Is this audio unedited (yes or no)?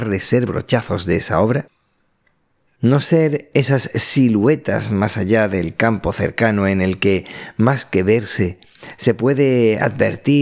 yes